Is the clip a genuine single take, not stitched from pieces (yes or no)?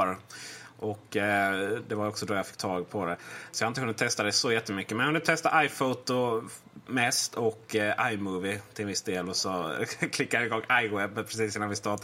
yes